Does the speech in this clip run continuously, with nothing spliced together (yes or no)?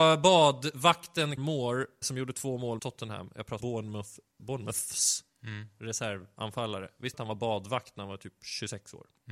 no